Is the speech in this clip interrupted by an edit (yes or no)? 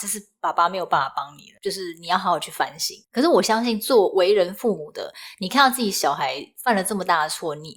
yes